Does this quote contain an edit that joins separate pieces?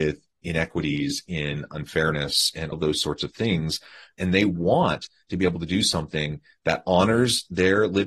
yes; 1 cut; at 2.7 s

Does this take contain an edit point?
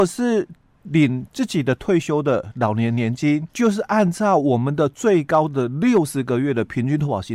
yes; 1 cut; at 3.5 s

